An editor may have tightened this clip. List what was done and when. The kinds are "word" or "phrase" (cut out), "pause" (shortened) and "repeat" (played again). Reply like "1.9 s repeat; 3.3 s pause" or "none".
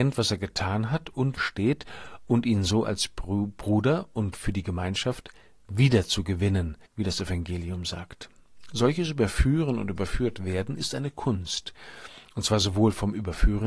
1.4 s phrase; 6.9 s pause